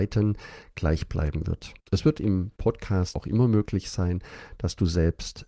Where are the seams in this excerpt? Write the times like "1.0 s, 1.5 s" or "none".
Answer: 1.8 s, 3.1 s